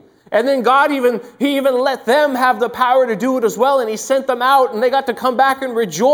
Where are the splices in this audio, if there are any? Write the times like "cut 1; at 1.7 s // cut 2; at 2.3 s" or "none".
none